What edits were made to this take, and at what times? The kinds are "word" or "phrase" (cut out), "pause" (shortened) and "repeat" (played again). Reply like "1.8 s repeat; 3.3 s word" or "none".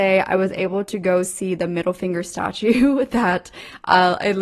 none